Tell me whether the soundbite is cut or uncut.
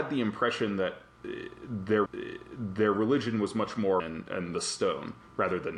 cut